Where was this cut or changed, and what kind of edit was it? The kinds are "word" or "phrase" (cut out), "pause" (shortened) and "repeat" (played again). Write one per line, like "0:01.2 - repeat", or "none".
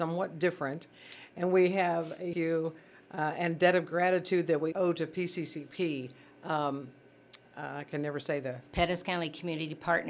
0:02.3 - phrase
0:04.7 - word
0:07.4 - pause